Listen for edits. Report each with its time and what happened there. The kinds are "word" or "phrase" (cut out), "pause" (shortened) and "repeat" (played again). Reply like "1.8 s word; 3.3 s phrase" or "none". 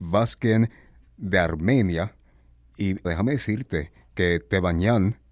1.1 s word; 3.0 s word